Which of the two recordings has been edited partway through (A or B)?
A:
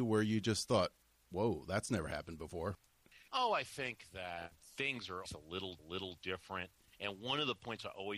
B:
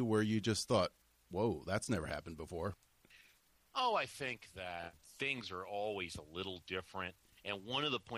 A